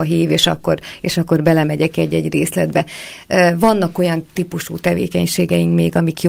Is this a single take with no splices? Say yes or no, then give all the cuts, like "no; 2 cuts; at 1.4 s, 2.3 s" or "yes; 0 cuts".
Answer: yes; 0 cuts